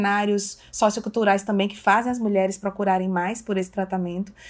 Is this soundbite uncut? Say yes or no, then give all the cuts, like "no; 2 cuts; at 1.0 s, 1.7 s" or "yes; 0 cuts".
yes; 0 cuts